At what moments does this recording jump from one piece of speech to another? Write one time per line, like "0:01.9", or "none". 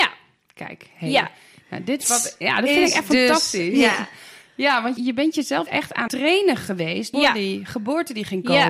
0:02.0
0:05.0
0:05.7
0:06.1
0:07.1